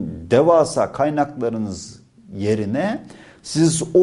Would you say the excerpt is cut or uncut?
uncut